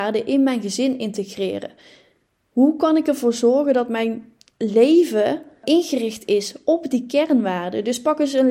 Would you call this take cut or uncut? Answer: uncut